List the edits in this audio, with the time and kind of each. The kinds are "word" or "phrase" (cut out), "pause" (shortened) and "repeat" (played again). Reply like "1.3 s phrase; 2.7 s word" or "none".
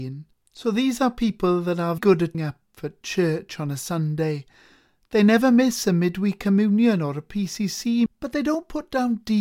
2.0 s word; 2.3 s word; 8.1 s word